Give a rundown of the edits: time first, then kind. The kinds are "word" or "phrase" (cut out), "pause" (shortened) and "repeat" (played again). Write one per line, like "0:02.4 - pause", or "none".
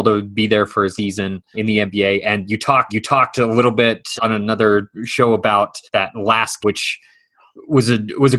0:01.0 - word
0:01.5 - word
0:02.9 - repeat
0:04.2 - word
0:05.9 - pause
0:06.6 - word